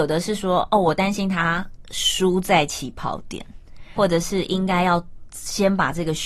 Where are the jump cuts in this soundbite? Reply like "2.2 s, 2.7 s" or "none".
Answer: 4.0 s